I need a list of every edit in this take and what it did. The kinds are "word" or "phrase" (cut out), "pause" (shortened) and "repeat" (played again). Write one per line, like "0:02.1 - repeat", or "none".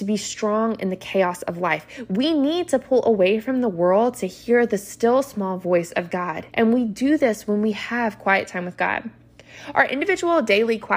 0:06.5 - pause